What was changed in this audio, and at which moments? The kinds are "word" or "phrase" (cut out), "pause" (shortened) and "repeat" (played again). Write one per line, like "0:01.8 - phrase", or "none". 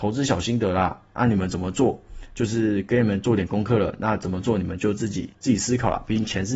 0:05.3 - pause